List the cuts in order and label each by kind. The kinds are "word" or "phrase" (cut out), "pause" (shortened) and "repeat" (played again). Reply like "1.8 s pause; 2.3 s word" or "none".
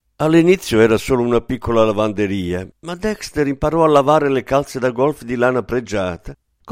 2.8 s pause